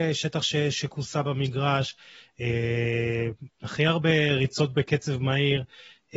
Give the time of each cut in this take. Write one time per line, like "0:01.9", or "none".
none

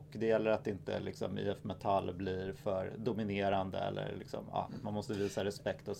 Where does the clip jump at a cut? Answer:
none

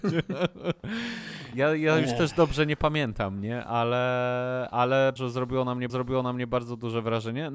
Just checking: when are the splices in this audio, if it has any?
0:05.2
0:05.9

